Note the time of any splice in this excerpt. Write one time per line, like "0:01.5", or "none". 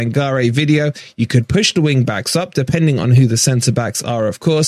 none